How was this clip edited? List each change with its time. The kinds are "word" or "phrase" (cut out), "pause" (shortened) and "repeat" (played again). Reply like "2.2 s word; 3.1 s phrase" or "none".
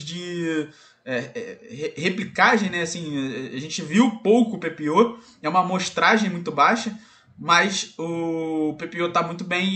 none